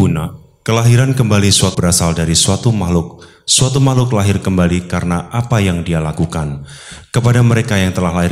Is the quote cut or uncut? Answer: cut